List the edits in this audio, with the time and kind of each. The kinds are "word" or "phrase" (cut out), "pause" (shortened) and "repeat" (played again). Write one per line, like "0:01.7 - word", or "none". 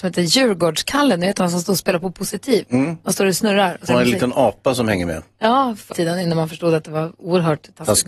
0:03.9 - phrase
0:05.9 - word